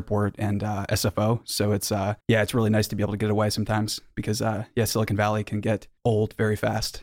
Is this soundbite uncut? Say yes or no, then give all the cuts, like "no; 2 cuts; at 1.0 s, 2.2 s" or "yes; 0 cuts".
no; 2 cuts; at 2.2 s, 6.0 s